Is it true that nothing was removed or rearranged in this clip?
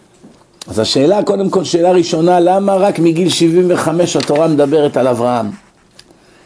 yes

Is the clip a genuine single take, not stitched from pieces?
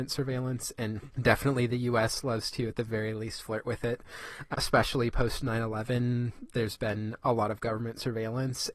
yes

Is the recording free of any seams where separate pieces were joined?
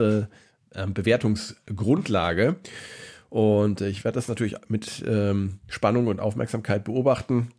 yes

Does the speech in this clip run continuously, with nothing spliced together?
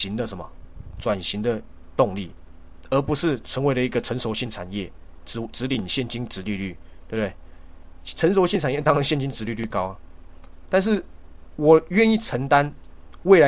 yes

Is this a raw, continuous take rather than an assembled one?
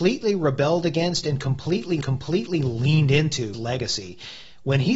no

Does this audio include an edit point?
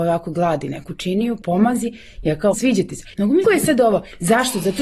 yes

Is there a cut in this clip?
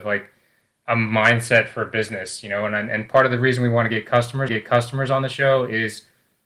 yes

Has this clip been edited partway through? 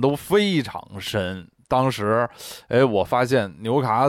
no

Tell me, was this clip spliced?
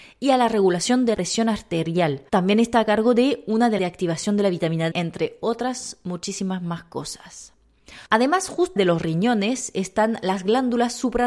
yes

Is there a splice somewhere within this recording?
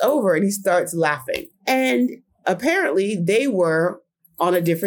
no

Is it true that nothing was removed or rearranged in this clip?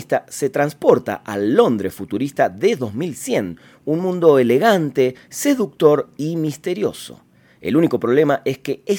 yes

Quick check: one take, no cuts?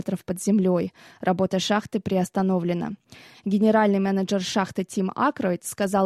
yes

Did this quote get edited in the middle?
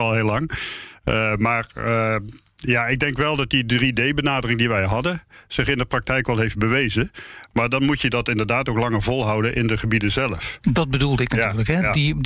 no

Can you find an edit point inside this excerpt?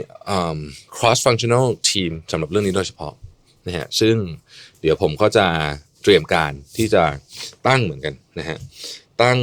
no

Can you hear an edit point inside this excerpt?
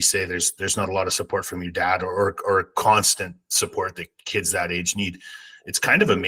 no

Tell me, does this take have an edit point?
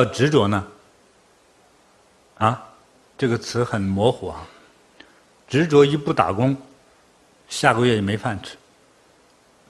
yes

